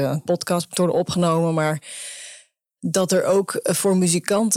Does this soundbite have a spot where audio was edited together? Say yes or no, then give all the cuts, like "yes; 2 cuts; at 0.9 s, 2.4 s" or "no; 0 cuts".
no; 0 cuts